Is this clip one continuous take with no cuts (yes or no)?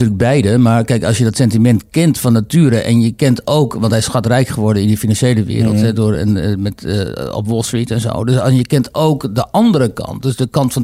yes